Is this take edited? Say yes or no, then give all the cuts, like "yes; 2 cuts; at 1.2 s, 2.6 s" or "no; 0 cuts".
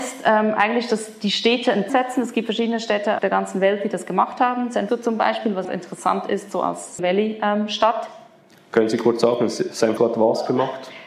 yes; 6 cuts; at 1.9 s, 3.2 s, 4.9 s, 5.6 s, 7.0 s, 10.0 s